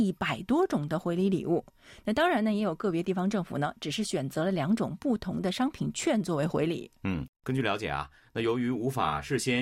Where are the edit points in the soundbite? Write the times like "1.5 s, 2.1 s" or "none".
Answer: 7.3 s